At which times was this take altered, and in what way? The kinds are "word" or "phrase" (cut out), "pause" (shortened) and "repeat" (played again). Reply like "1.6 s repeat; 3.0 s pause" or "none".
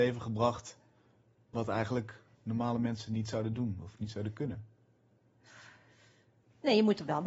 none

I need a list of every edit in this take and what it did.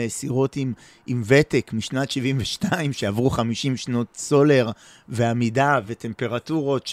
none

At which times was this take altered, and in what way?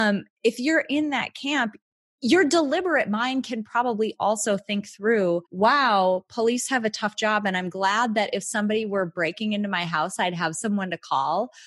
5.4 s pause

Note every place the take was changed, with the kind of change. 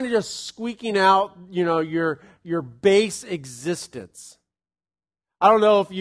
none

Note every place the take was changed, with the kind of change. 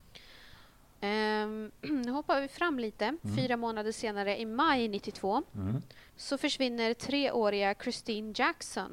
1.8 s pause; 6.1 s pause

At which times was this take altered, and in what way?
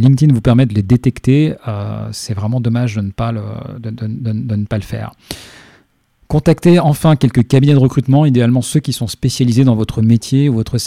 none

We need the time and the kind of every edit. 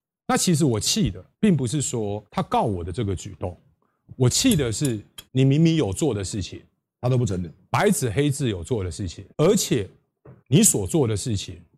1.3 s pause; 2.3 s pause; 5.3 s pause; 9.3 s pause; 10.4 s pause

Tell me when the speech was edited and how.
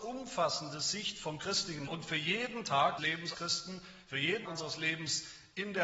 1.9 s word; 3.0 s word; 3.3 s word; 4.5 s word

